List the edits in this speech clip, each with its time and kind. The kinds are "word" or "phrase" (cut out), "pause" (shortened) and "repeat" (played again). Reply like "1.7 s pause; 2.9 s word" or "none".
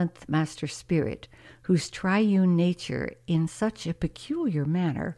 none